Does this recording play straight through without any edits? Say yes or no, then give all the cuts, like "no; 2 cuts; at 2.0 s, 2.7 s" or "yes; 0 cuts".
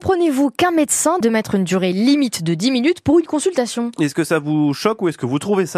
no; 1 cut; at 1.2 s